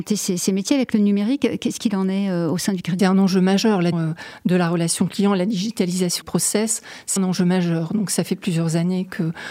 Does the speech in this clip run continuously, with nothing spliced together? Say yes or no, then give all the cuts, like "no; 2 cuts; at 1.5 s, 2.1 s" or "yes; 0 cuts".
no; 4 cuts; at 3.0 s, 3.9 s, 6.2 s, 7.2 s